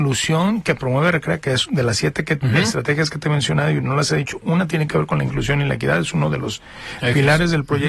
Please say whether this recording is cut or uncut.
uncut